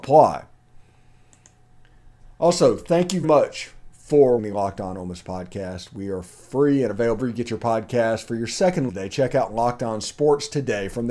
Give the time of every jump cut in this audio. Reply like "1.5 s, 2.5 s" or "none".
3.2 s, 4.4 s, 7.2 s, 8.9 s